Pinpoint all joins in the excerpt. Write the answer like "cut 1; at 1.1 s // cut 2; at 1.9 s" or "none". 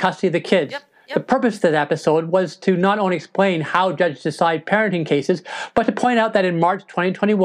none

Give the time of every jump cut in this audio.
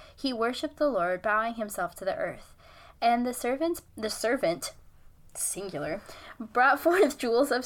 cut 1; at 3.9 s

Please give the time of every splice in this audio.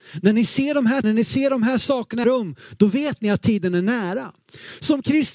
cut 1; at 1.0 s // cut 2; at 2.2 s

